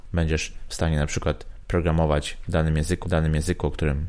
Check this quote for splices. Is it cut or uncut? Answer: cut